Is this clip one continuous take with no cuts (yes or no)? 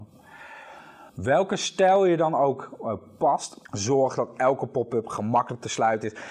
no